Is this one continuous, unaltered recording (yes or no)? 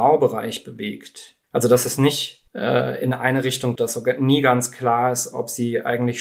no